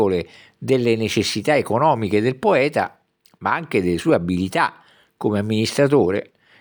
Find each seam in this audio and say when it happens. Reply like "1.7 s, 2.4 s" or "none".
none